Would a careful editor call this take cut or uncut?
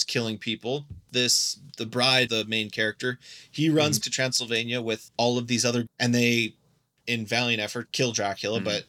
cut